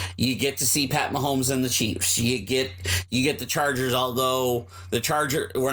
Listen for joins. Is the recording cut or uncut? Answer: uncut